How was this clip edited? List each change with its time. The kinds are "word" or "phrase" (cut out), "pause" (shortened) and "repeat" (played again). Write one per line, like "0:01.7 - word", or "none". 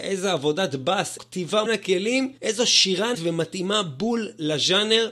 0:01.2 - word
0:01.7 - phrase
0:02.4 - pause
0:03.1 - word